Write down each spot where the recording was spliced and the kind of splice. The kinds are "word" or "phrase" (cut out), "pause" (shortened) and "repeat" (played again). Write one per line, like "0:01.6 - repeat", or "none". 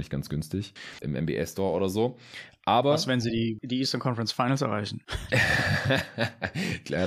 0:01.0 - word